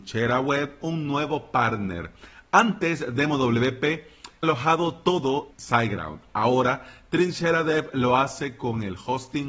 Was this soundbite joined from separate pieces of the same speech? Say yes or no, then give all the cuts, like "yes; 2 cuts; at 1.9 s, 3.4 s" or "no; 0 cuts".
yes; 2 cuts; at 4.4 s, 5.5 s